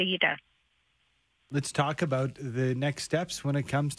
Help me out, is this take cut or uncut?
uncut